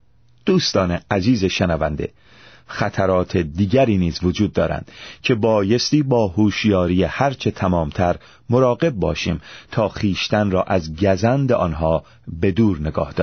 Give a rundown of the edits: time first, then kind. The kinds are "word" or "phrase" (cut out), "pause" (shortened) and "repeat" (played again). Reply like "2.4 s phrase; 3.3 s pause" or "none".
none